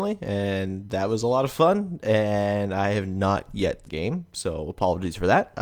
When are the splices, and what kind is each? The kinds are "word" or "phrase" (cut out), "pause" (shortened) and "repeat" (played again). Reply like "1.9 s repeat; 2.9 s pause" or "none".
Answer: 3.9 s phrase